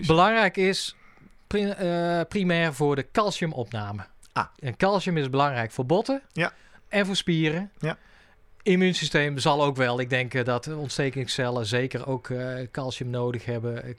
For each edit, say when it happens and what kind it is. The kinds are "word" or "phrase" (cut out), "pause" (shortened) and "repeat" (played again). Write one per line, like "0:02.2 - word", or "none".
none

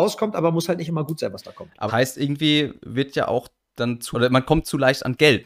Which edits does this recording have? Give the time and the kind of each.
0:01.9 - phrase
0:04.1 - word

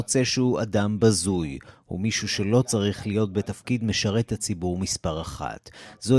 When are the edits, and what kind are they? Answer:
none

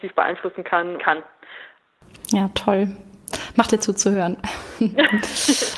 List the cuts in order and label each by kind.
0:01.0 - phrase
0:03.7 - word

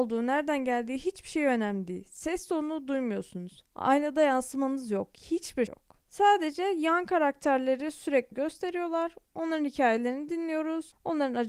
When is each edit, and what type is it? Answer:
0:05.7 - word
0:08.3 - phrase

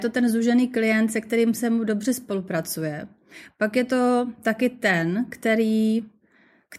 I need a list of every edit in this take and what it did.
none

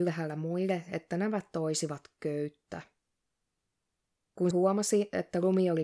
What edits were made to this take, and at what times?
0:04.5 - word

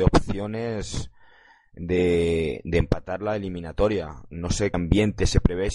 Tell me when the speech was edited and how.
0:04.7 - word

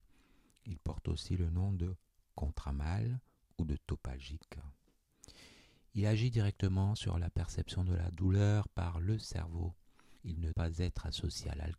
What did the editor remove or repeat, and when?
0:10.2 - pause
0:10.5 - word

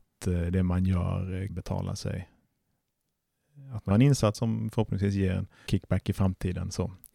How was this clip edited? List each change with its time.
0:01.5 - word
0:03.9 - word
0:04.3 - word
0:05.7 - word

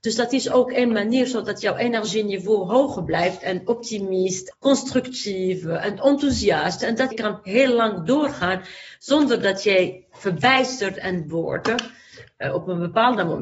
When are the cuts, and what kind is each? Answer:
0:04.5 - word
0:07.1 - word
0:11.3 - word

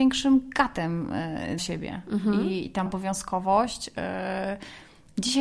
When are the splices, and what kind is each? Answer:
0:01.6 - word
0:02.9 - word

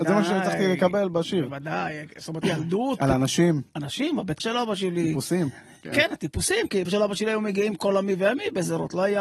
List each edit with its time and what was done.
0:02.4 - word
0:04.4 - word
0:06.8 - word

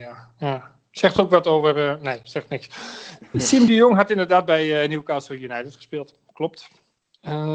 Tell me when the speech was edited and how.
none

